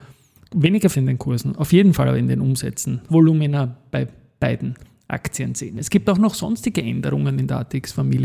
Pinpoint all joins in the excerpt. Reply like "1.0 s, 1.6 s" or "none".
0.9 s, 1.5 s, 3.1 s